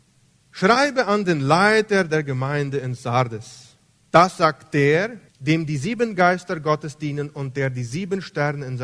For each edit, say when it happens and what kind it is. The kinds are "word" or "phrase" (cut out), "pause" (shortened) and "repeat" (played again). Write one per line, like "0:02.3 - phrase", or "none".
0:03.9 - pause
0:05.3 - pause